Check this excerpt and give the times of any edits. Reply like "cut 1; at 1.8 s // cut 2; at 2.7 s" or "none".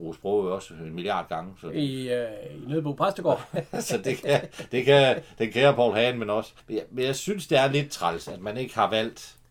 cut 1; at 6.6 s